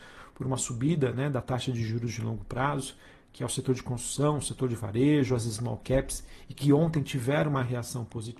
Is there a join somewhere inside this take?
no; 0 cuts

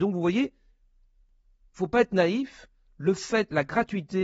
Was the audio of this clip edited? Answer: no; 0 cuts

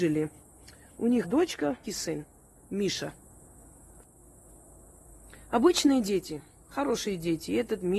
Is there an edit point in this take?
yes; 2 cuts; at 1.2 s, 1.8 s

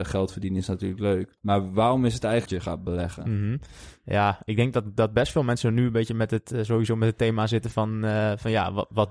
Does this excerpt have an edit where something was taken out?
yes; 2 cuts; at 1.4 s, 2.5 s

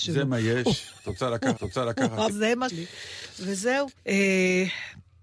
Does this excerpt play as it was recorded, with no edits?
no; 4 cuts; at 1.6 s, 2.3 s, 2.7 s, 4.0 s

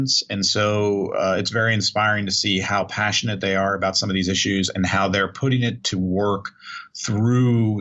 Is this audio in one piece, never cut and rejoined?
yes; 0 cuts

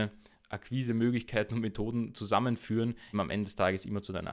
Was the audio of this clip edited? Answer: yes; 1 cut; at 3.1 s

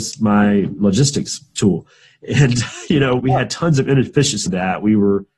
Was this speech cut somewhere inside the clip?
yes; 2 cuts; at 3.2 s, 4.5 s

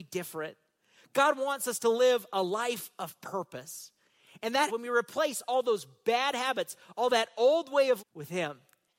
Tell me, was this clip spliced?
yes; 2 cuts; at 4.7 s, 8.0 s

